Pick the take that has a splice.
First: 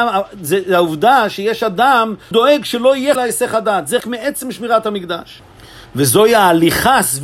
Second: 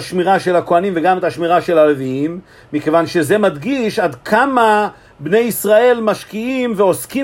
first; 3 cuts; at 2.3 s, 3.2 s, 4.0 s

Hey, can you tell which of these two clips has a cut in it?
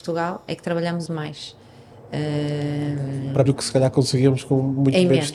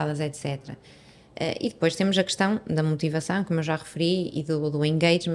first; 2 cuts; at 1.1 s, 3.5 s

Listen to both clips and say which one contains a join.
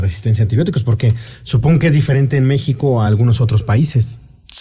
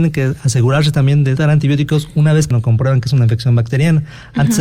second; 2 cuts; at 1.4 s, 2.5 s

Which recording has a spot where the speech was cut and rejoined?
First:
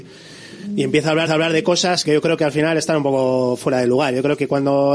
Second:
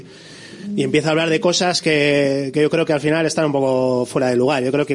first; 2 cuts; at 1.3 s, 2.0 s

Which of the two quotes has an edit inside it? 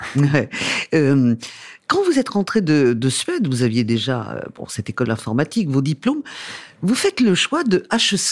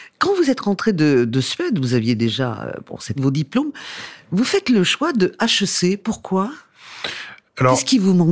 second; 1 cut; at 3.2 s

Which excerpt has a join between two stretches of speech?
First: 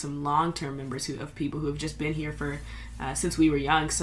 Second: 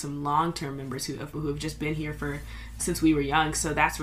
second; 2 cuts; at 1.3 s, 2.8 s

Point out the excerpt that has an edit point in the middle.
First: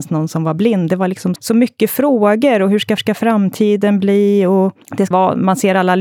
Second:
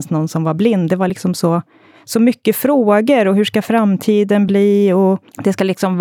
first; 3 cuts; at 1.4 s, 3.0 s, 5.1 s

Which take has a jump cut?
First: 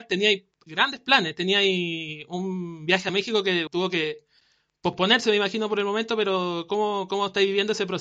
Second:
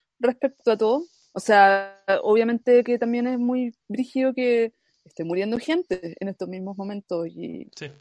first; 1 cut; at 3.7 s

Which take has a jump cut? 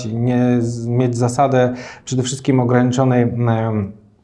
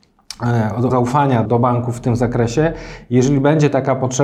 second; 2 cuts; at 0.9 s, 1.5 s

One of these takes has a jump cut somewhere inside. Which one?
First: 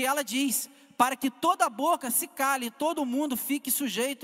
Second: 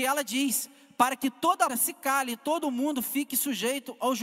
second; 1 cut; at 1.7 s

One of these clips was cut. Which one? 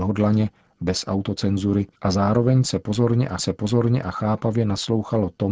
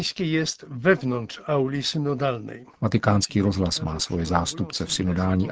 first; 2 cuts; at 2.0 s, 3.4 s

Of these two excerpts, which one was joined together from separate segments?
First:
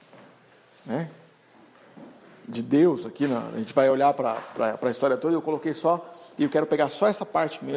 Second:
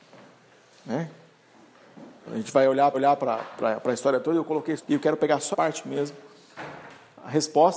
second; 4 cuts; at 2.3 s, 2.9 s, 4.8 s, 5.5 s

